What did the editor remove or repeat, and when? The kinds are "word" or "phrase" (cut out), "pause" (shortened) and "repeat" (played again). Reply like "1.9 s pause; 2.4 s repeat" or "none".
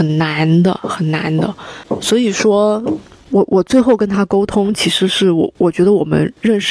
none